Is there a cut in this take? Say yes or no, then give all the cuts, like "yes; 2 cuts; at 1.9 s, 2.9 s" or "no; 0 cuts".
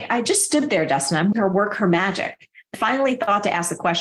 yes; 2 cuts; at 1.3 s, 2.7 s